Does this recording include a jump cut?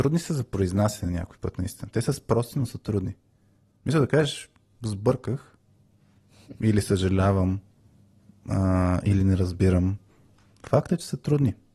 no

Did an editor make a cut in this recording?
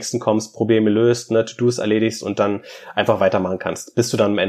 no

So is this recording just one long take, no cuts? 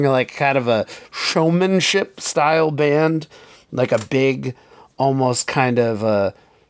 no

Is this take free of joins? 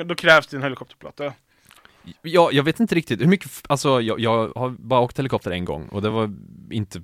yes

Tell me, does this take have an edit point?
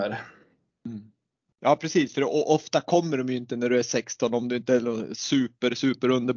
no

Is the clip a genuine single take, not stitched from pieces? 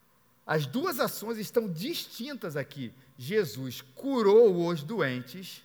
yes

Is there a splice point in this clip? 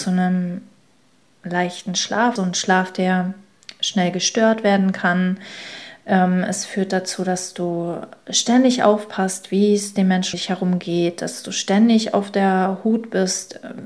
yes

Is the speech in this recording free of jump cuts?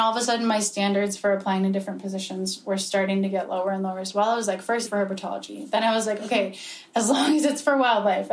no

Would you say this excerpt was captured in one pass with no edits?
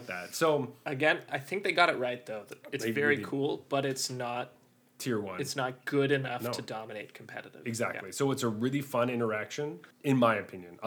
yes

